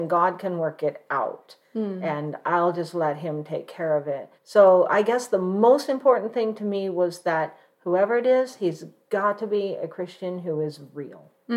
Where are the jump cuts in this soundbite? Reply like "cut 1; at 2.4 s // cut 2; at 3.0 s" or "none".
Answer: cut 1; at 4.4 s